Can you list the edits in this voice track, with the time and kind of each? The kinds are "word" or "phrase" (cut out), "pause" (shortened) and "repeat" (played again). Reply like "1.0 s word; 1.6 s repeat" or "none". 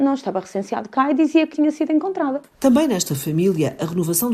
1.5 s phrase